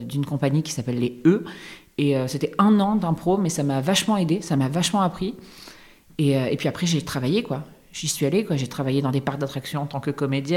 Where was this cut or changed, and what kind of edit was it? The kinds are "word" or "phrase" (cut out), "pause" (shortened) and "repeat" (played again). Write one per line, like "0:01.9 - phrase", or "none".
none